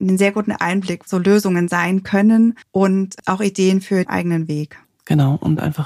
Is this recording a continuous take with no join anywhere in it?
no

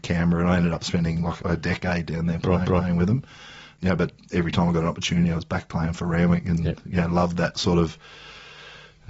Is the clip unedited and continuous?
no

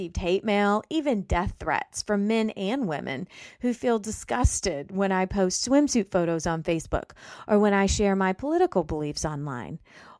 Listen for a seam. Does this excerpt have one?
no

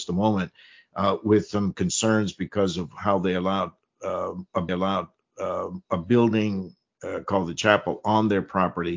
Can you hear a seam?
yes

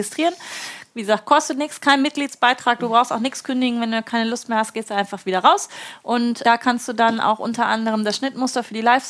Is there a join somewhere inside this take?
yes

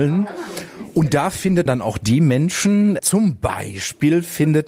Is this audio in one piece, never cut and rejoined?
no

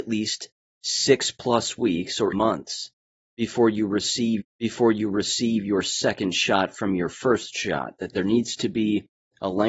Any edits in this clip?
yes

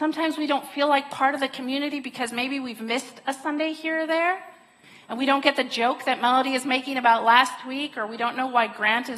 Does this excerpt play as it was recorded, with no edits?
yes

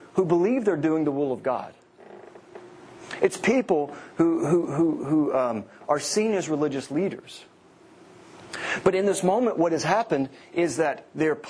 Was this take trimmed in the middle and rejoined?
no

